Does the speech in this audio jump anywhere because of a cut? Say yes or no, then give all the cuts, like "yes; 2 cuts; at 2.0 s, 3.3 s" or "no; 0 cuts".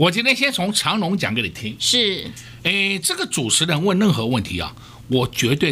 no; 0 cuts